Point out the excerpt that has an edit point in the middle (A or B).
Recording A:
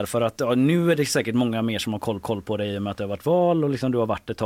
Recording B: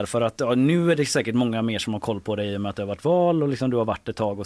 A